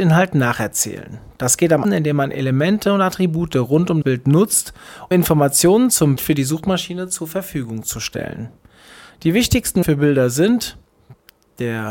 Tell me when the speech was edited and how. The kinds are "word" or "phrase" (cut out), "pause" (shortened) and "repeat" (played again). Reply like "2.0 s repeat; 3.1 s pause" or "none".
1.8 s word; 4.0 s word; 5.1 s word; 6.2 s word; 9.8 s word

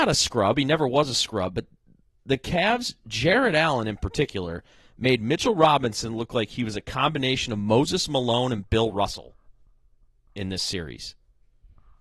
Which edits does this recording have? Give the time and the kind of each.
none

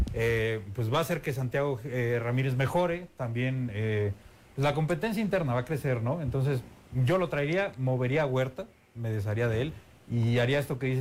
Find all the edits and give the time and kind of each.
none

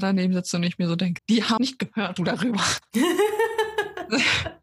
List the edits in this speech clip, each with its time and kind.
1.2 s word; 1.6 s phrase; 2.2 s phrase

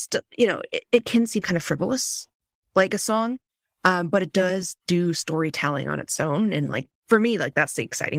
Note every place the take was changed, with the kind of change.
none

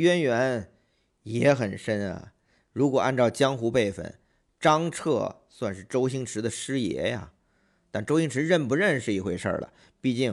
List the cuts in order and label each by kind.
none

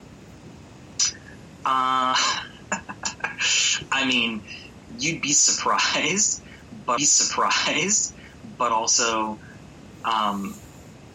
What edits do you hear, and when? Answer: 7.0 s repeat

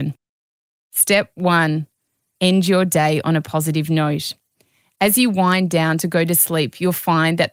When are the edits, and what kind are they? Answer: none

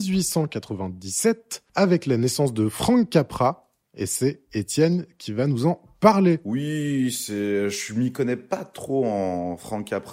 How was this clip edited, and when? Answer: 1.7 s pause

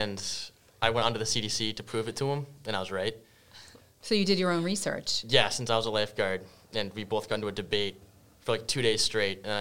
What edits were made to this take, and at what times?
none

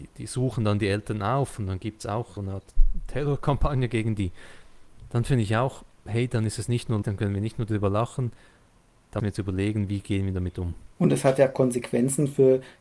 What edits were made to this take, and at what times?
2.4 s word; 7.0 s word; 9.2 s word; 10.9 s pause

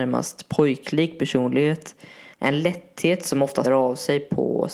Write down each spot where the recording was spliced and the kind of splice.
2.3 s pause; 3.6 s word

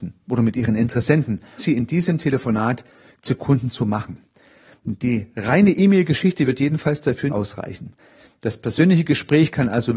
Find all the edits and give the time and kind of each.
1.6 s word; 7.3 s word

